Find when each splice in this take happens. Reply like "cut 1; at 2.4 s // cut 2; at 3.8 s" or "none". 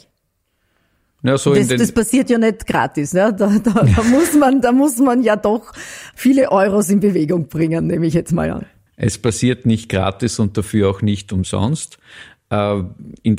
cut 1; at 6.1 s // cut 2; at 8.9 s

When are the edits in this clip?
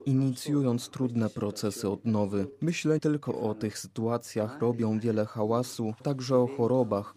cut 1; at 3.0 s // cut 2; at 3.7 s // cut 3; at 4.6 s // cut 4; at 6.0 s

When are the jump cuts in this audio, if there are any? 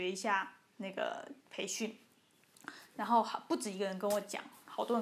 cut 1; at 1.4 s

